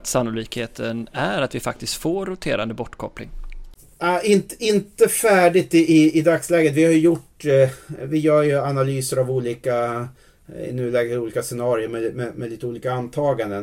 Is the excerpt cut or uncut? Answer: uncut